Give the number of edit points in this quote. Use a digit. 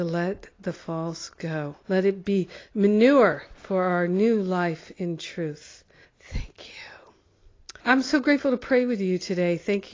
4